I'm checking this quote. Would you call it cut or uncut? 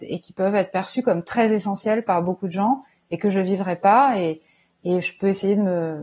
uncut